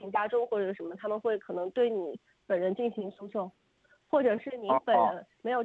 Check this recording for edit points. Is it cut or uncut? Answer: uncut